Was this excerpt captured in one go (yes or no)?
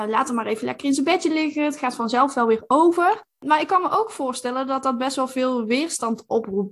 yes